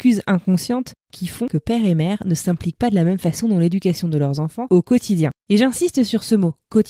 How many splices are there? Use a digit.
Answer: 1